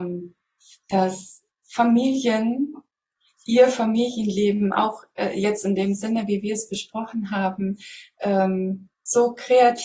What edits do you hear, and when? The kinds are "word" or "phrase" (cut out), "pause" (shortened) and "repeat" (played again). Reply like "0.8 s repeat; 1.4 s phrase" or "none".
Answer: none